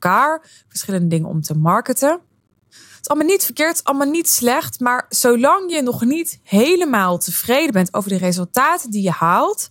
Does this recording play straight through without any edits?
yes; 0 cuts

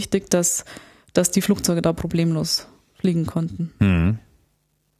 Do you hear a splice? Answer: no; 0 cuts

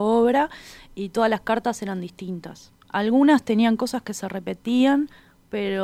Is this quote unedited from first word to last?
yes; 0 cuts

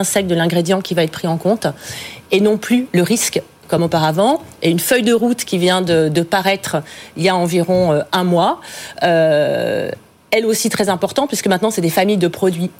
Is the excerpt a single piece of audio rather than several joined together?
yes; 0 cuts

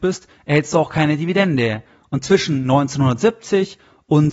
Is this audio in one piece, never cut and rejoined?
yes; 0 cuts

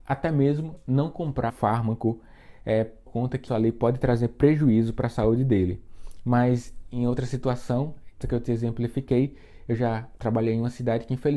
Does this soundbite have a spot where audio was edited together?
yes; 4 cuts; at 1.5 s, 3.1 s, 3.5 s, 8.2 s

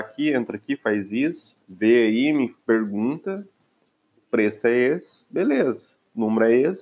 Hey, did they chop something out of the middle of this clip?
yes; 2 cuts; at 1.6 s, 2.6 s

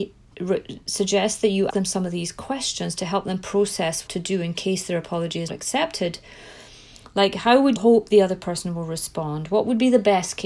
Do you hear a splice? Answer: yes; 4 cuts; at 1.7 s, 4.1 s, 5.5 s, 7.8 s

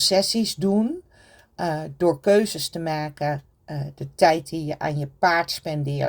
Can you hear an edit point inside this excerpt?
no; 0 cuts

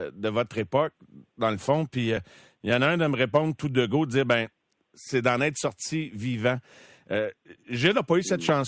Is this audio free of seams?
yes; 0 cuts

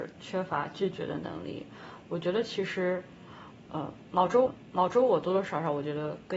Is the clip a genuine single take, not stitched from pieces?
no; 1 cut; at 4.5 s

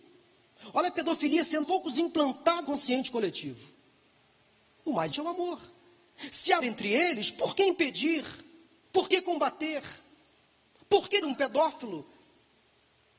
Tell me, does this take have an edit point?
yes; 5 cuts; at 1.6 s, 2.6 s, 5.1 s, 6.6 s, 11.2 s

